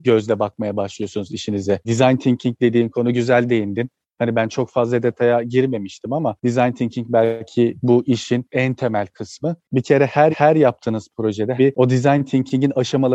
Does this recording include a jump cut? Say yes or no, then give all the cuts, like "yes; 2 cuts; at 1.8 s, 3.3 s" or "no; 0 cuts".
yes; 3 cuts; at 9.6 s, 10.3 s, 11.6 s